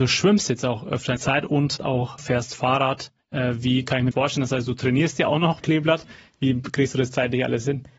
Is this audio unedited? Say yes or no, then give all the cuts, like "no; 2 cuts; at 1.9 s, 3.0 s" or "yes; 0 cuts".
no; 5 cuts; at 1.2 s, 1.8 s, 2.2 s, 4.1 s, 5.6 s